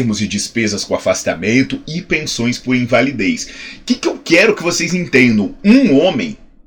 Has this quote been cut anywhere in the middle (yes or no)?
no